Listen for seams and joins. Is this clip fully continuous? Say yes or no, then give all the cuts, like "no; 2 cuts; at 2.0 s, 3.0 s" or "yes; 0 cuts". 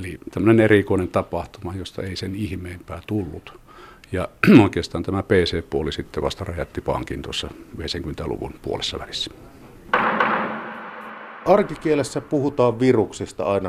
yes; 0 cuts